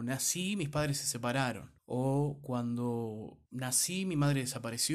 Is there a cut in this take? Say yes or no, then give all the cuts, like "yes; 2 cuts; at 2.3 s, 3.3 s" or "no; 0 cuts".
yes; 2 cuts; at 1.8 s, 3.5 s